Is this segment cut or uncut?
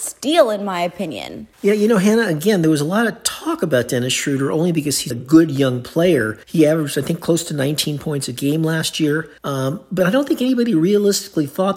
cut